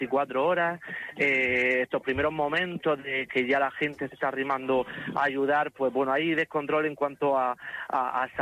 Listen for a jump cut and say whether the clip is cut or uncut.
uncut